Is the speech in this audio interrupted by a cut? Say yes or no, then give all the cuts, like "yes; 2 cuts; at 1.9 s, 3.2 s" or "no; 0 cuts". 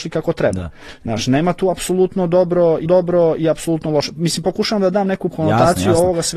yes; 2 cuts; at 2.9 s, 5.3 s